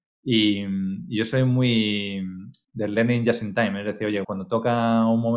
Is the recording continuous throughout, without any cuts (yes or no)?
no